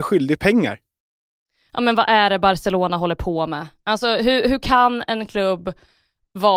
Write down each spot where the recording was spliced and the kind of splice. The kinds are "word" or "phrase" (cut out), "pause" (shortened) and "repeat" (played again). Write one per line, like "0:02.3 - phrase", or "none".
none